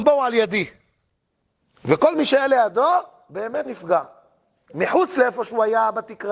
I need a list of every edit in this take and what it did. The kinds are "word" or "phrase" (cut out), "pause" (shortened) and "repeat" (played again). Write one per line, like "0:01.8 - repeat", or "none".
0:03.6 - word